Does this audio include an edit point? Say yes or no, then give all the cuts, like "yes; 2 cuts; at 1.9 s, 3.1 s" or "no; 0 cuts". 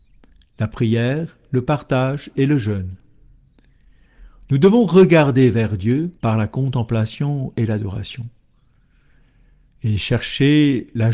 yes; 1 cut; at 6.2 s